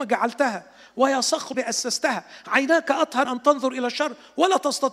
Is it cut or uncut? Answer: cut